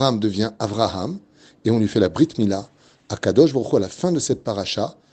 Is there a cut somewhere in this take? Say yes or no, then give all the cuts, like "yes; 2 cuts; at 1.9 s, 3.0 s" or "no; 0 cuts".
no; 0 cuts